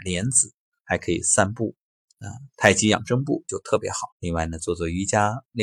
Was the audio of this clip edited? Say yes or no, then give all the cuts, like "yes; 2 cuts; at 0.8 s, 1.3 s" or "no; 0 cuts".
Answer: yes; 1 cut; at 4.1 s